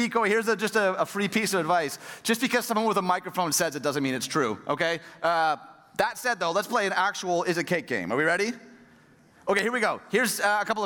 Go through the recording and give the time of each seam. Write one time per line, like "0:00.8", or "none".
none